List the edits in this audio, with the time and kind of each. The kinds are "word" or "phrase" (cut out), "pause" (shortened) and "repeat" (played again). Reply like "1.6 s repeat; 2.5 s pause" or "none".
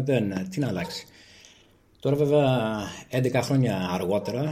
none